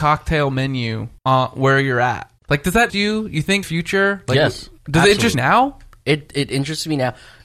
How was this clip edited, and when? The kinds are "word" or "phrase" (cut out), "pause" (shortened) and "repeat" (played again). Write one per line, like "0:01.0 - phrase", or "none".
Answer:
0:01.2 - pause
0:02.4 - pause
0:02.9 - word
0:03.6 - phrase
0:04.8 - pause
0:05.3 - word